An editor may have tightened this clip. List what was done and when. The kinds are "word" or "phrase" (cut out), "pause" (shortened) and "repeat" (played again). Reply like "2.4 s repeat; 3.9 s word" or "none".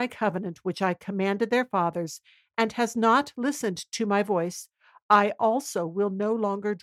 none